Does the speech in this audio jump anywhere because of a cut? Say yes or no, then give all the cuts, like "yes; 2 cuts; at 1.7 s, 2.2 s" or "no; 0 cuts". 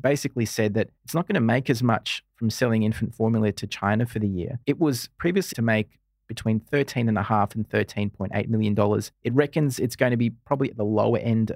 yes; 4 cuts; at 1.0 s, 4.6 s, 5.5 s, 9.1 s